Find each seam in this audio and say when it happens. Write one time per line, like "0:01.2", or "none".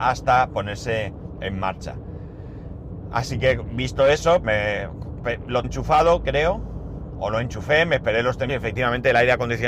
0:04.4
0:05.6
0:08.5